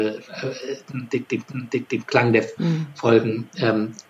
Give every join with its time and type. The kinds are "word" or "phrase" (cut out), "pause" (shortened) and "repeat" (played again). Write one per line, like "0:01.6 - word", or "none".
0:01.5 - repeat
0:02.6 - word